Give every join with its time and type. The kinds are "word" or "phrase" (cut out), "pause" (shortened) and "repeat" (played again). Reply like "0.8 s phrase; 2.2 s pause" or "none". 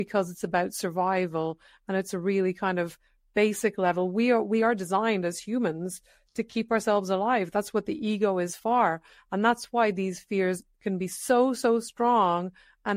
none